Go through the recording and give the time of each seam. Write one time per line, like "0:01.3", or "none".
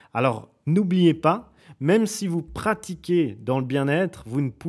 none